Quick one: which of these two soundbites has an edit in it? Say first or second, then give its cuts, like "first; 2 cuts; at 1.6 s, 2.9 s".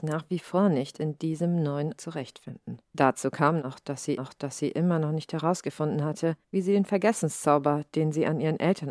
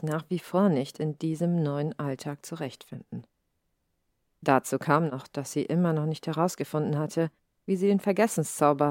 first; 4 cuts; at 2.0 s, 2.8 s, 4.2 s, 6.4 s